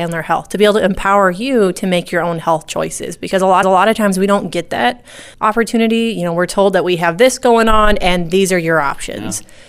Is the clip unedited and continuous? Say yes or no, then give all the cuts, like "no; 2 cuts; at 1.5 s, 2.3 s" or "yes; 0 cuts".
no; 2 cuts; at 3.6 s, 5.3 s